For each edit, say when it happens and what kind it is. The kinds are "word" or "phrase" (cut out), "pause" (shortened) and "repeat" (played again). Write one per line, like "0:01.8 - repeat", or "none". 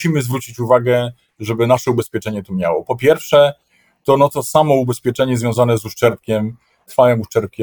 none